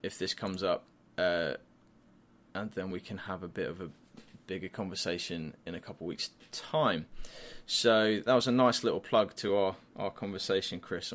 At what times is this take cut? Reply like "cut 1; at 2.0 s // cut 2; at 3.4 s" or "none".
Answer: none